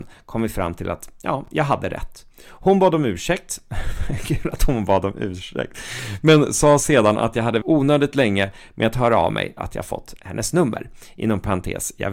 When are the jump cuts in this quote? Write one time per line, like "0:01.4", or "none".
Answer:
0:07.6
0:09.6